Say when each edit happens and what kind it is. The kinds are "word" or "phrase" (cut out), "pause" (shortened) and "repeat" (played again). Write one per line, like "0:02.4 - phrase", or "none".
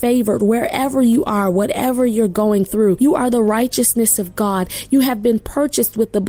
none